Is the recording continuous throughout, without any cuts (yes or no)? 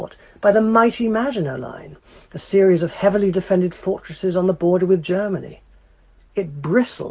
yes